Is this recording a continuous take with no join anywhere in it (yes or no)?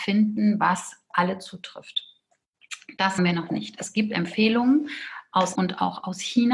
no